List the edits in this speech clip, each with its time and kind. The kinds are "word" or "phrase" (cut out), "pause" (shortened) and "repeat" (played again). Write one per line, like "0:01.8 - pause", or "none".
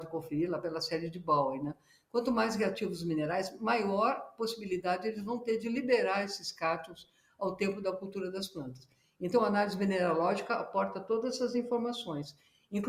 none